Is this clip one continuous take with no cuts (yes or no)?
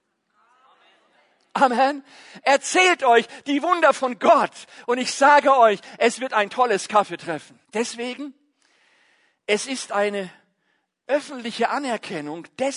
no